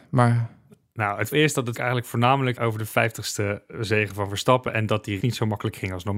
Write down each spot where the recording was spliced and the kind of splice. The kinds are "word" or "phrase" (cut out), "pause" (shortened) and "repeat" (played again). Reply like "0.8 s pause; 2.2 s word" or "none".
1.3 s word; 1.7 s word; 2.6 s word; 5.2 s word

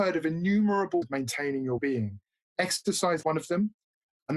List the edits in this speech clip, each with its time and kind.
1.0 s word; 1.8 s word; 3.2 s word

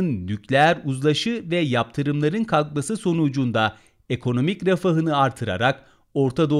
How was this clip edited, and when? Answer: none

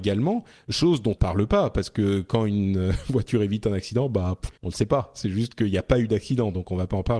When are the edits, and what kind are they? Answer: 1.2 s phrase; 4.5 s pause

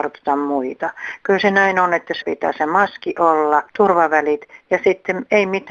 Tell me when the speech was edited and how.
2.2 s word; 3.7 s word

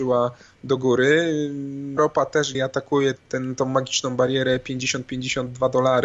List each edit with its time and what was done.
2.0 s phrase; 2.5 s phrase; 3.2 s word

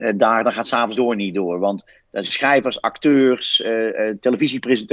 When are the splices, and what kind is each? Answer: 1.0 s word; 2.2 s word

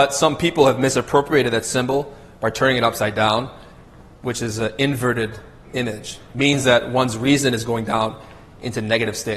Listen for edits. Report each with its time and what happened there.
none

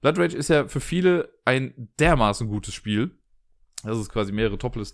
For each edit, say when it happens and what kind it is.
none

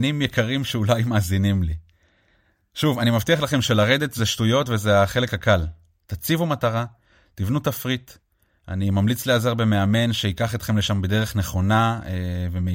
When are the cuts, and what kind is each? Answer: none

